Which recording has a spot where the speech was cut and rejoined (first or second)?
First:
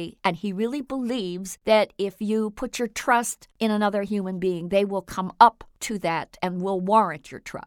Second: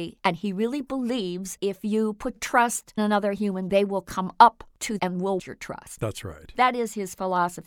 second